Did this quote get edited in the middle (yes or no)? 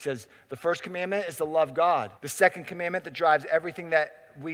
yes